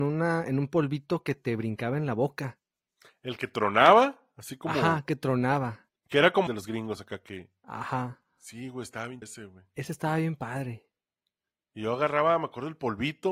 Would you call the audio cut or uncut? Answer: cut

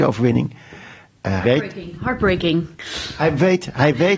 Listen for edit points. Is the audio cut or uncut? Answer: cut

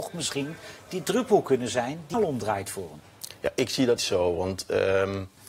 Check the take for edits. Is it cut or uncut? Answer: cut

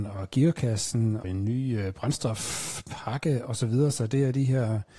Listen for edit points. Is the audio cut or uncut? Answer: cut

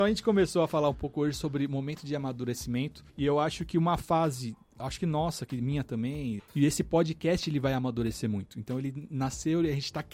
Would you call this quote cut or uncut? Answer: cut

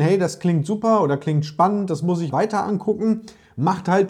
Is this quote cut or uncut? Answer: cut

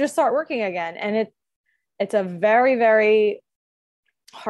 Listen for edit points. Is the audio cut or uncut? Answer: uncut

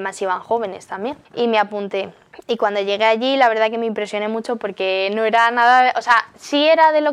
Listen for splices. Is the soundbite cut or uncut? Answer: cut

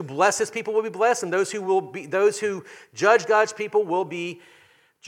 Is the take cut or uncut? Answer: uncut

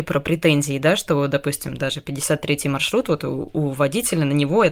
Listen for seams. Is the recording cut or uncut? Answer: uncut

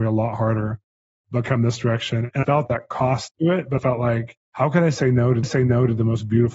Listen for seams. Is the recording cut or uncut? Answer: cut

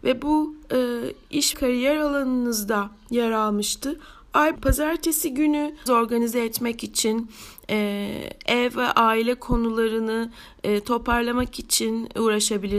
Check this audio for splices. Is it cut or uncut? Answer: cut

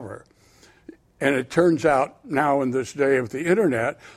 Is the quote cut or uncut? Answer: uncut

